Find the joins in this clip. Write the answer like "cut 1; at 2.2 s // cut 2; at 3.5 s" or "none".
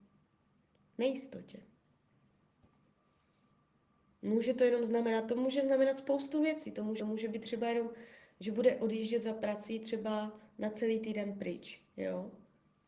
cut 1; at 7.0 s